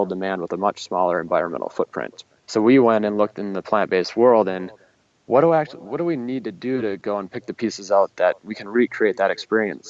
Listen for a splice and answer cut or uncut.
uncut